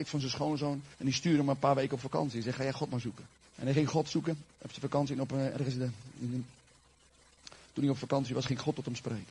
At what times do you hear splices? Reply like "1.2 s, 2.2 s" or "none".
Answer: 0.9 s, 3.4 s, 4.5 s